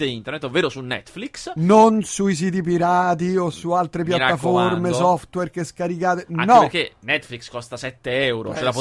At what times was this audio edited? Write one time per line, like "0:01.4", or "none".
none